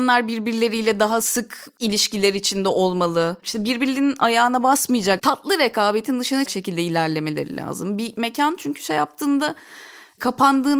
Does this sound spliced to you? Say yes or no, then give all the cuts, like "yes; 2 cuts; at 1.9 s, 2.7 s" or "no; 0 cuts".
yes; 3 cuts; at 3.4 s, 5.2 s, 6.5 s